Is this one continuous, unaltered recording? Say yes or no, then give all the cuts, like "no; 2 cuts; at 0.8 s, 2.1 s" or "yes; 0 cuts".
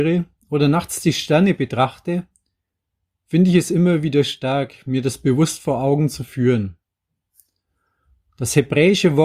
yes; 0 cuts